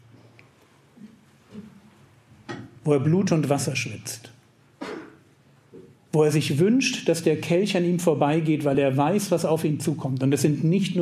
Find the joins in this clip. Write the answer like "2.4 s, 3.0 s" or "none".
none